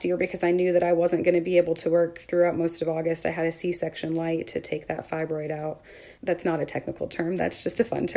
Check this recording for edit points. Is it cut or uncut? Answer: uncut